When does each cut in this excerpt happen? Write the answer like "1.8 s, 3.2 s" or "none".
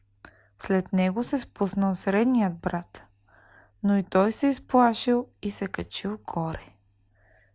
none